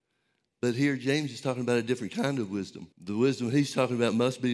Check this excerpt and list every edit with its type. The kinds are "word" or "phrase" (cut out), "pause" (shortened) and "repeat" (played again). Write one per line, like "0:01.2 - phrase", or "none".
0:02.9 - pause